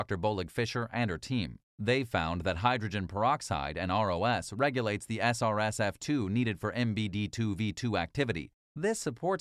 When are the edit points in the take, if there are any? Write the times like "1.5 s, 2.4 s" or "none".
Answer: 1.7 s

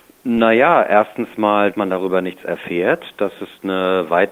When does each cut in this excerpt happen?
1.7 s

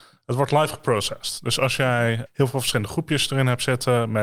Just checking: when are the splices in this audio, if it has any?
2.3 s

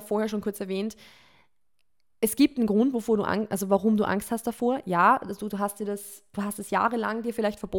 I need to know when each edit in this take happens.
none

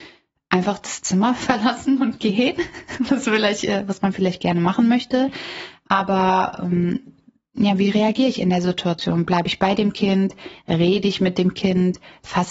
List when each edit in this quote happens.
none

